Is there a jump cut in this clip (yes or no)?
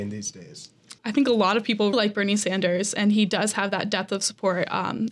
yes